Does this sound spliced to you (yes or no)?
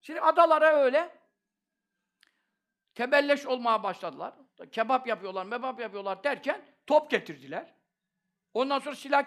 no